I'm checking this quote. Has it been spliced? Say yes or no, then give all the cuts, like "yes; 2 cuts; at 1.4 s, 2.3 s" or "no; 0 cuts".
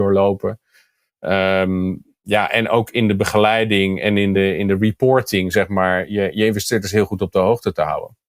no; 0 cuts